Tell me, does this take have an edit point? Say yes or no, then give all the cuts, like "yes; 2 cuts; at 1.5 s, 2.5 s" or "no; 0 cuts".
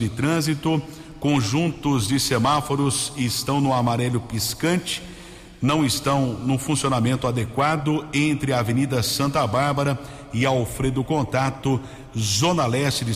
no; 0 cuts